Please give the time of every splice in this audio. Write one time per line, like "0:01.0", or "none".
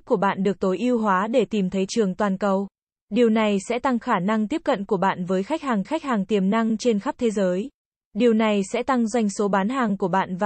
0:01.9
0:02.9
0:05.8
0:07.8